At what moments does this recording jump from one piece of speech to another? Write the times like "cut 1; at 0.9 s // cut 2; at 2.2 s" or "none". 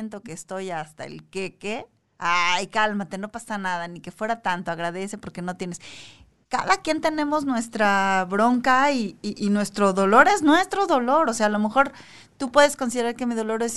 none